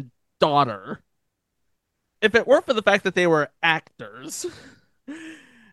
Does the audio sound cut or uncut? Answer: uncut